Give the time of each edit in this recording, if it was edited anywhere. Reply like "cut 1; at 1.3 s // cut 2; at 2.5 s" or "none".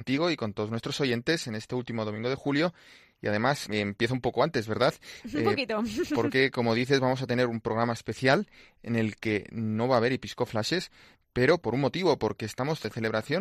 none